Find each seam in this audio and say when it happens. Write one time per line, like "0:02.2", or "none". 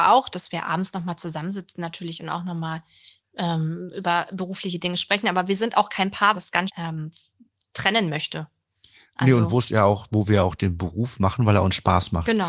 0:06.3
0:06.7